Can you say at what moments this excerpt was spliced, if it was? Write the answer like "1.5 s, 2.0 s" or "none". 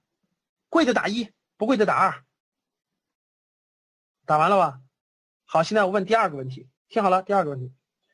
6.8 s